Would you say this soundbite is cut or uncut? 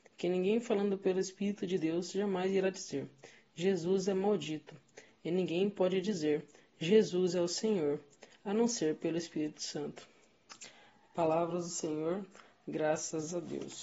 uncut